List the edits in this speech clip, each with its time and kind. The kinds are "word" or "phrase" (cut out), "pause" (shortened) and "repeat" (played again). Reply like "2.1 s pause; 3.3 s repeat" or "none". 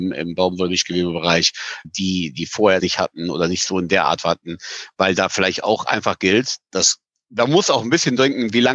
1.8 s word; 2.8 s word